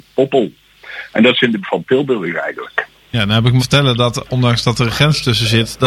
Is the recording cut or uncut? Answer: cut